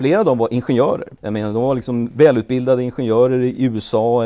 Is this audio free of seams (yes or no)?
no